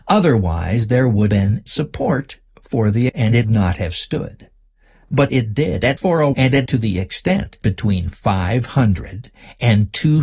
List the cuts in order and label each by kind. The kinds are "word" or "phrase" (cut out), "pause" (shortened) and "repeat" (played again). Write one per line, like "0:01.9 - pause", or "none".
0:01.3 - word
0:01.7 - word
0:03.1 - word
0:03.4 - word
0:05.3 - word
0:06.0 - word
0:06.3 - word
0:06.7 - word
0:07.6 - word